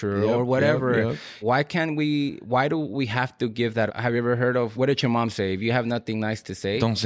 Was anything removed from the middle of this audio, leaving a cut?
yes; 3 cuts; at 1.4 s, 3.9 s, 4.7 s

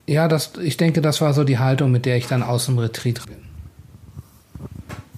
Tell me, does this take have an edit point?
yes; 1 cut; at 3.2 s

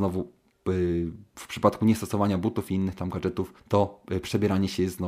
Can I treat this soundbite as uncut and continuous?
no; 1 cut; at 3.6 s

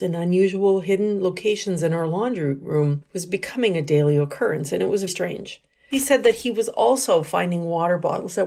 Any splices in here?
yes; 1 cut; at 5.1 s

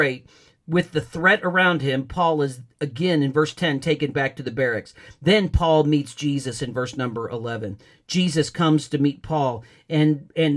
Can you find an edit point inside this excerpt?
no; 0 cuts

